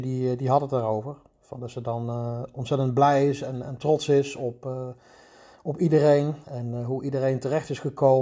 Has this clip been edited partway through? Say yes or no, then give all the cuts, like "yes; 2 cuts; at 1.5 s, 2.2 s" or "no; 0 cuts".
no; 0 cuts